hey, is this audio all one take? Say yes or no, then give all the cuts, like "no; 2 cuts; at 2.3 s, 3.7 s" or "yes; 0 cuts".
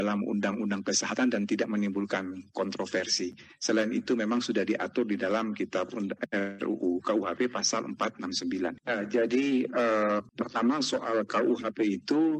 yes; 0 cuts